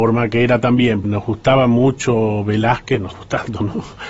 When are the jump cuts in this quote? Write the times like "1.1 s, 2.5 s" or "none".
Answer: 1.0 s, 3.1 s